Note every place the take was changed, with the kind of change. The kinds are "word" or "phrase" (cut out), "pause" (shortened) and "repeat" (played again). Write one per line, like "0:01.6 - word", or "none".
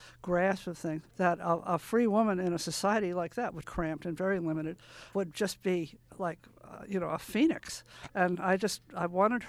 0:01.1 - pause
0:03.6 - phrase
0:05.1 - word

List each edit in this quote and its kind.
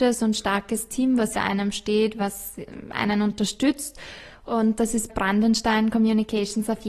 0:01.3 - word
0:05.1 - word

